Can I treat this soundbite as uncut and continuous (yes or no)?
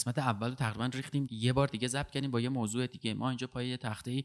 no